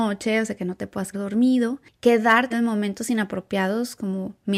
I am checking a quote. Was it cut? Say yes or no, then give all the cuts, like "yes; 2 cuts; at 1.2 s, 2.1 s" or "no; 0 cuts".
yes; 2 cuts; at 1.1 s, 2.5 s